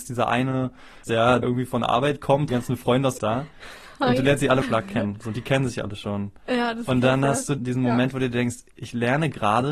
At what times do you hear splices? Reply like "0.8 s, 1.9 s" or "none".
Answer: 1.0 s, 1.4 s, 2.5 s, 3.2 s, 4.6 s, 7.6 s